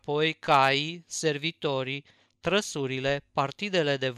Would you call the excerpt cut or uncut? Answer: uncut